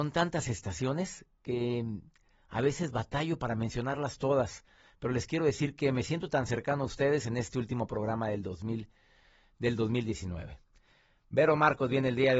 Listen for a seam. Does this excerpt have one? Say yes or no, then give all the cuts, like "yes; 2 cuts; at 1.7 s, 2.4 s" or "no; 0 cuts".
no; 0 cuts